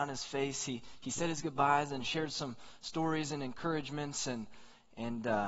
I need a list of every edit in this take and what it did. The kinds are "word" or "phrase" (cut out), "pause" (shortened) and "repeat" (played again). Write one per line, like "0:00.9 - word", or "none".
none